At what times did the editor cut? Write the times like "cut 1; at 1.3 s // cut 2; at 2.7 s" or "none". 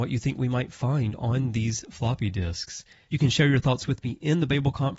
none